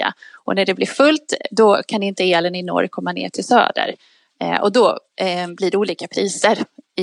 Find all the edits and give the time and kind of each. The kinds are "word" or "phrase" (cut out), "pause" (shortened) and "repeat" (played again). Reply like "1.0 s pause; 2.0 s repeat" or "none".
none